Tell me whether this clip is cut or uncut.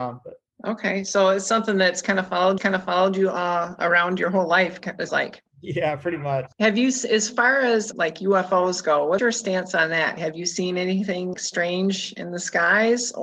cut